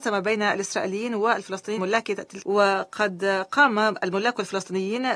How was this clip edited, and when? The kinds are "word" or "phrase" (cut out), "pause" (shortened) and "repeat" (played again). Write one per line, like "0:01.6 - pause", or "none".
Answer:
0:01.8 - word
0:02.4 - word